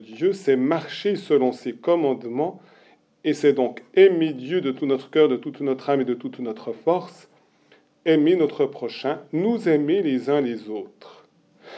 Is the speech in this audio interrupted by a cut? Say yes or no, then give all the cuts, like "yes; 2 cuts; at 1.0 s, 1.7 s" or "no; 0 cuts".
no; 0 cuts